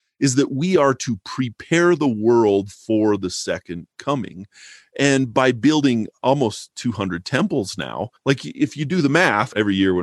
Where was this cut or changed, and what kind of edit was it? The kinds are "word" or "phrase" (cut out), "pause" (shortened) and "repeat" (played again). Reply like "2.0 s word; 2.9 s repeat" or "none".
none